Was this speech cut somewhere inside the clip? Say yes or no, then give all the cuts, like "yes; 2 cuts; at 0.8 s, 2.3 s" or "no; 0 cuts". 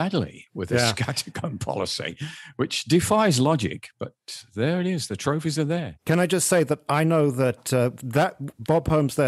yes; 1 cut; at 6.0 s